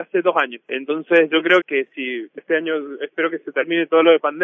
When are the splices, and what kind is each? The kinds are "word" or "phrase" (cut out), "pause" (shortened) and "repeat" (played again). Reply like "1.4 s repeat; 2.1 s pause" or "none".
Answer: 1.6 s word; 2.4 s word